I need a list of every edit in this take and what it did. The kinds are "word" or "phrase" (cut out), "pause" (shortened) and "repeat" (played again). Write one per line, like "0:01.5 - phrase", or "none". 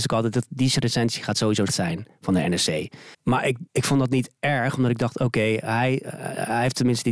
0:01.7 - word
0:03.1 - pause
0:03.7 - pause